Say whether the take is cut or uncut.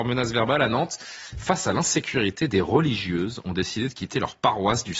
uncut